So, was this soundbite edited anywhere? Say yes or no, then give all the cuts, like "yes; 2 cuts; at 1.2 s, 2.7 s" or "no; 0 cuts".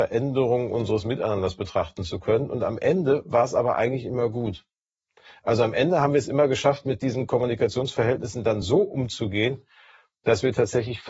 no; 0 cuts